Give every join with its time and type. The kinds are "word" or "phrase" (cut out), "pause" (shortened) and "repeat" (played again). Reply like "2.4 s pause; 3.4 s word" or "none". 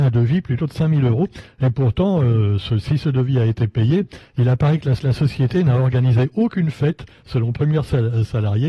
5.0 s repeat